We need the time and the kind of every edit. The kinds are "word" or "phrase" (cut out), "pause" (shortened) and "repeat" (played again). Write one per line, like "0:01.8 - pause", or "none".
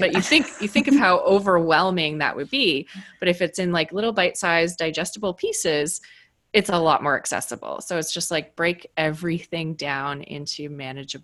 none